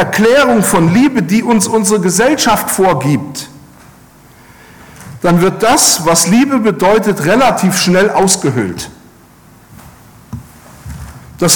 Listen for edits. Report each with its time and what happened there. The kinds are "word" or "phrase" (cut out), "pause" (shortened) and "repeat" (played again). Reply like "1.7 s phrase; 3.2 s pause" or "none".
none